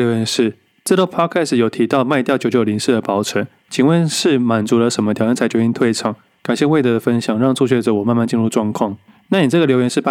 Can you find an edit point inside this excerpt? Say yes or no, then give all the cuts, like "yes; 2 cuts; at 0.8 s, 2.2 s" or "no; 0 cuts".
no; 0 cuts